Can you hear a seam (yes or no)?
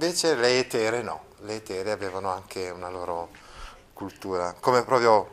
no